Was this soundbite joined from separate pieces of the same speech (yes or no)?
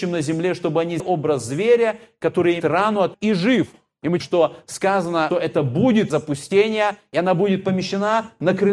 yes